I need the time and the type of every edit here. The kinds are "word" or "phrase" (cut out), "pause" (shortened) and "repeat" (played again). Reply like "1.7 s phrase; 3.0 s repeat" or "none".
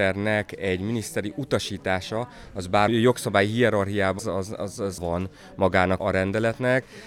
2.9 s word; 4.2 s word; 5.0 s word; 6.0 s word